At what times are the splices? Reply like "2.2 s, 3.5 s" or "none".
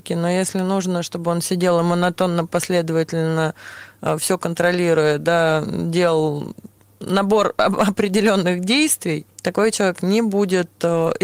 none